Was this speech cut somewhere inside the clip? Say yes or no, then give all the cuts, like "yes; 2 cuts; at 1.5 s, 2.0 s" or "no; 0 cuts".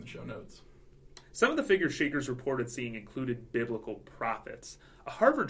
no; 0 cuts